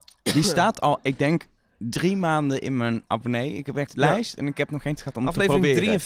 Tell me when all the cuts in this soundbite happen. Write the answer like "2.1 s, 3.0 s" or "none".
1.0 s, 3.9 s, 5.0 s